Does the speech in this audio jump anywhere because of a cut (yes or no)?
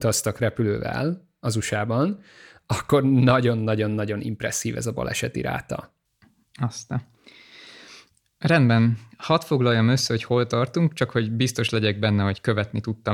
no